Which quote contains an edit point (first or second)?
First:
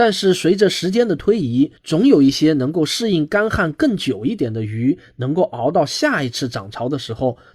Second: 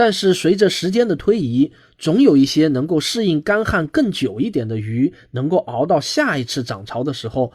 first